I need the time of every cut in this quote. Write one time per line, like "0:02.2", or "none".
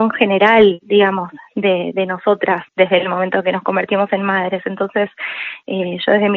0:02.7